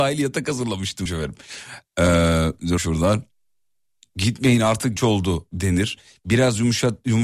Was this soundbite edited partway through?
yes; 3 cuts; at 1.1 s, 2.8 s, 5.0 s

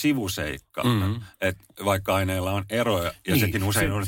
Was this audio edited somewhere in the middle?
no; 0 cuts

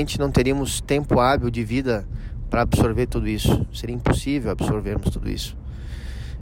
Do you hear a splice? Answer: no; 0 cuts

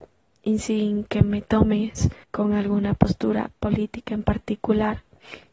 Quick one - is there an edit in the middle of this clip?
yes; 1 cut; at 2.2 s

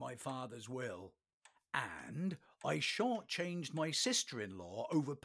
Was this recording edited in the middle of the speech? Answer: no; 0 cuts

